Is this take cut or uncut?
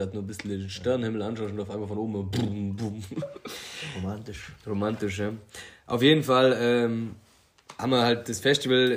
cut